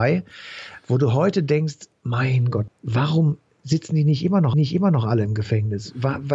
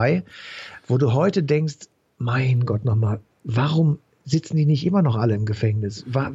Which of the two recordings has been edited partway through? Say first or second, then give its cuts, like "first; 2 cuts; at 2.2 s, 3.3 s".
first; 3 cuts; at 2.0 s, 2.7 s, 4.5 s